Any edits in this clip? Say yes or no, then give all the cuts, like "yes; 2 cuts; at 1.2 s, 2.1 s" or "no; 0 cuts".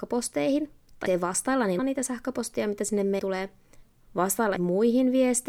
yes; 4 cuts; at 1.1 s, 1.8 s, 3.2 s, 4.6 s